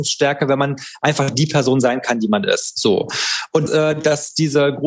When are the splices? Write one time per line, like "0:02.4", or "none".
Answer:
0:03.7